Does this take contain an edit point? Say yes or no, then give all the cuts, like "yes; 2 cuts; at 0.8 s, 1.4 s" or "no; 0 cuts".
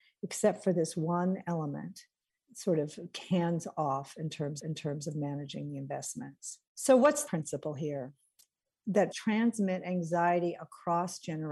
yes; 5 cuts; at 2.4 s, 4.6 s, 6.7 s, 7.3 s, 9.1 s